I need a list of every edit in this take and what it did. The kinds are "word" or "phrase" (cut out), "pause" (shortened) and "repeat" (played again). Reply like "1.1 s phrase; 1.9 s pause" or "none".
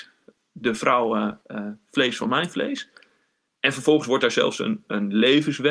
1.4 s pause